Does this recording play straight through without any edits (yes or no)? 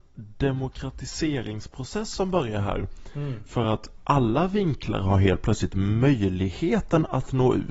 yes